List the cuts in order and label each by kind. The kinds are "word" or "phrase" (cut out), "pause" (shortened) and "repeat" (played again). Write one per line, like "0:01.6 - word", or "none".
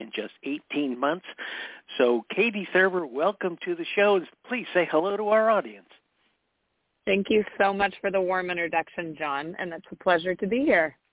none